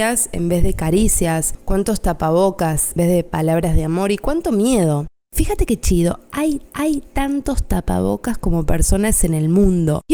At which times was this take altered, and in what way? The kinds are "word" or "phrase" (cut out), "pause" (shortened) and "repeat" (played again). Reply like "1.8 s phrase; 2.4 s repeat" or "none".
3.0 s word; 6.7 s repeat